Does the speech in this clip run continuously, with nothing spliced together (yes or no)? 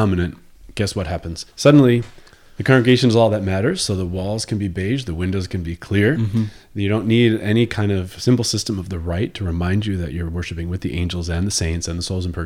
no